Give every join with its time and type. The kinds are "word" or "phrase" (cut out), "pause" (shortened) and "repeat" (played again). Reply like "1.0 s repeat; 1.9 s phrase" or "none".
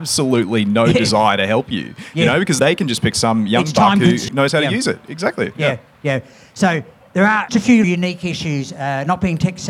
2.6 s word; 4.3 s word; 7.5 s word; 7.8 s word